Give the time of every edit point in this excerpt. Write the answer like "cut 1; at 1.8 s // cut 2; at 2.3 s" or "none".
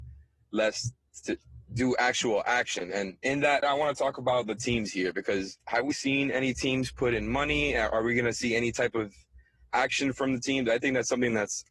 cut 1; at 5.9 s